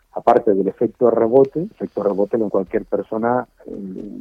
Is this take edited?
yes; 2 cuts; at 1.7 s, 2.5 s

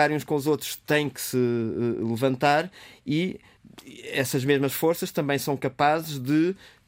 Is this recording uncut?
no; 1 cut; at 1.1 s

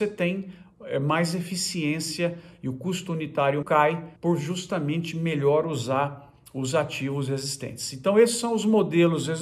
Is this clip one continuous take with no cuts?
no; 2 cuts; at 3.6 s, 4.2 s

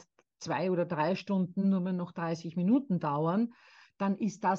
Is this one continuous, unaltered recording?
yes; 0 cuts

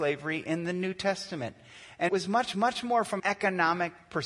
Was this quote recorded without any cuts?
no; 3 cuts; at 2.1 s, 2.5 s, 3.2 s

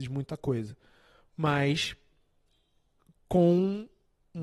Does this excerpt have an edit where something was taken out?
no; 0 cuts

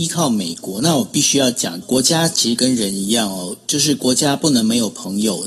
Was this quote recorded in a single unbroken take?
no; 1 cut; at 1.8 s

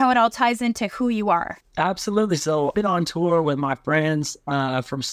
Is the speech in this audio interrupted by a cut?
yes; 2 cuts; at 1.7 s, 2.7 s

